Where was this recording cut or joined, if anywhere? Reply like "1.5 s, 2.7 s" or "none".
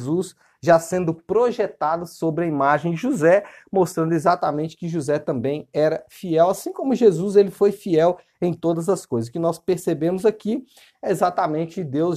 none